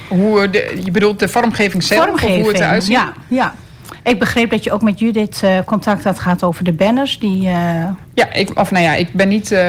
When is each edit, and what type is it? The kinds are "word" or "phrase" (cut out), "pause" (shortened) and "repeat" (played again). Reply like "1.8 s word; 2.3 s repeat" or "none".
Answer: 2.8 s word